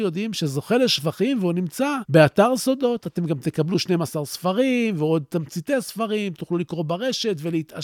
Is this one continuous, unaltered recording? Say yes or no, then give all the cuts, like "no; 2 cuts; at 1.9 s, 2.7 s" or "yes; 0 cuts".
yes; 0 cuts